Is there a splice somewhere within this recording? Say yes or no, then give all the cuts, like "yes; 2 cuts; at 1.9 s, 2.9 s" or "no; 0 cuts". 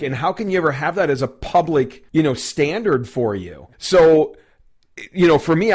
yes; 2 cuts; at 2.1 s, 3.7 s